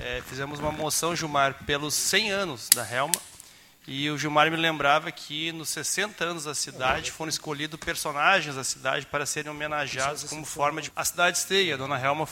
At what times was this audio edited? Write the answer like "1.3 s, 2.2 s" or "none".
10.9 s